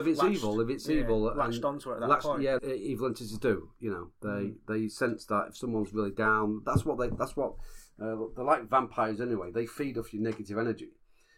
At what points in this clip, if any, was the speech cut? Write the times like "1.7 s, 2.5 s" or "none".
2.6 s